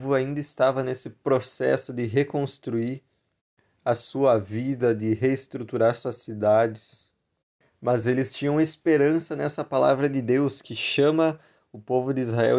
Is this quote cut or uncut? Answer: uncut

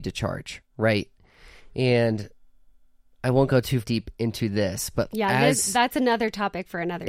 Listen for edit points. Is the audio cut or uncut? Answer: cut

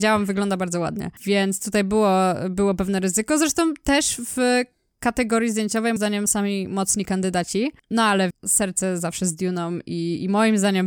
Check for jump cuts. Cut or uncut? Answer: cut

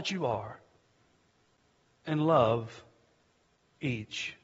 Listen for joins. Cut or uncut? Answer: uncut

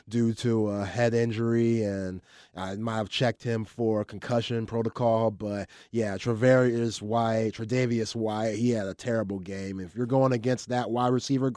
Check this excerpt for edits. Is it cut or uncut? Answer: uncut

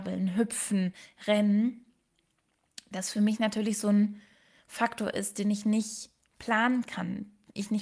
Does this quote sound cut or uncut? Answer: uncut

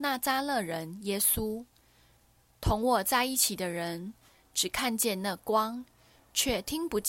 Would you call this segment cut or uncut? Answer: uncut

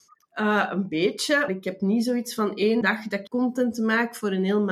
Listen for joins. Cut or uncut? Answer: cut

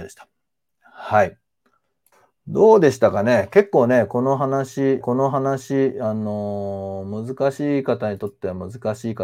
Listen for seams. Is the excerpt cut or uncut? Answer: cut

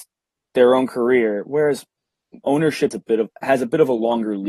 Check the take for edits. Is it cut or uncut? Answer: cut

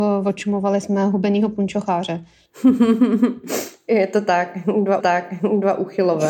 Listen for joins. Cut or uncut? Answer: cut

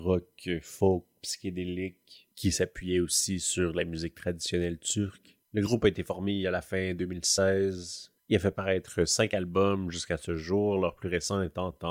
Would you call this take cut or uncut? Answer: uncut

